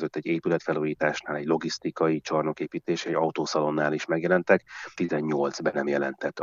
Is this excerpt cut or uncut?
cut